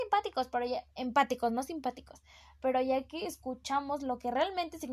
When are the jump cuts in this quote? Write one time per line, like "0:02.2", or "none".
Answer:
none

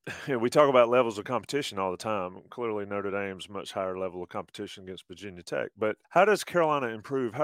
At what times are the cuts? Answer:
0:06.0

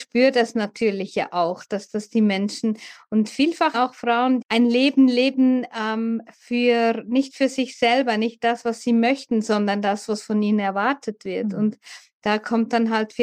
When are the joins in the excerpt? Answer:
0:03.7
0:04.4

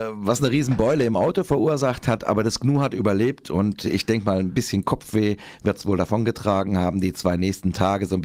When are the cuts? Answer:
none

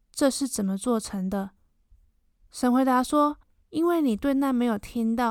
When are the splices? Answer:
0:01.6
0:03.4

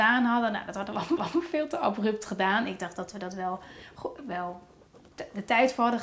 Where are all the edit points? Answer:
0:01.2

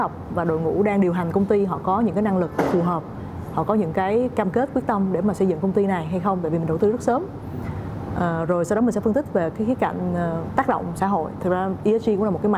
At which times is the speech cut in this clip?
none

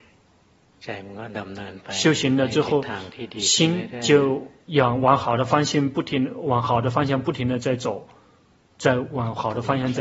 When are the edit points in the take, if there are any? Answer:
none

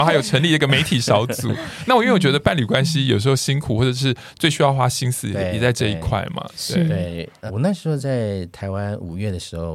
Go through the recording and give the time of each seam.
0:07.5

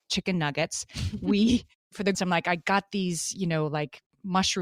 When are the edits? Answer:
0:02.1

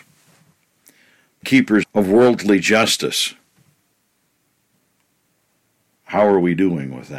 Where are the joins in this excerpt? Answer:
0:01.4
0:01.8

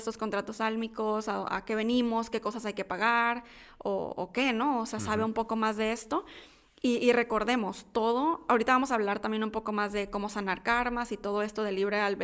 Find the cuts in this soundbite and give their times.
none

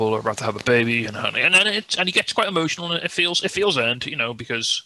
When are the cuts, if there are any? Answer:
none

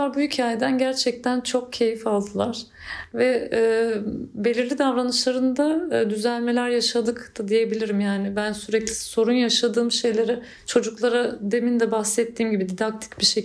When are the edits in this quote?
none

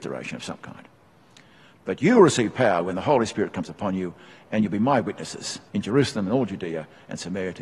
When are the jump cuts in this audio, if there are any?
0:05.7

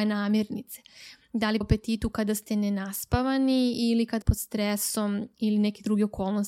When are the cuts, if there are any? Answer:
0:01.6
0:04.2

